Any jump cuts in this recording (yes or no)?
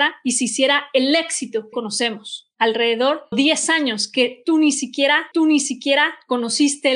yes